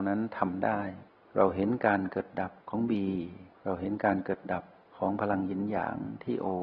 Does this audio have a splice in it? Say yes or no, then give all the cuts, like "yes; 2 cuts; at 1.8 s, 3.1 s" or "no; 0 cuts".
yes; 3 cuts; at 1.1 s, 2.6 s, 3.5 s